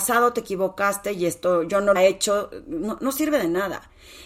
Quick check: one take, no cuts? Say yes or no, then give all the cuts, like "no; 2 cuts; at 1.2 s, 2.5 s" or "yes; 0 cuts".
no; 1 cut; at 2.0 s